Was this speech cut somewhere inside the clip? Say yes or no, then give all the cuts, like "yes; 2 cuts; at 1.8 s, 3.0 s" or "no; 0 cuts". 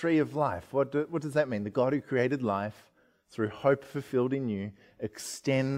no; 0 cuts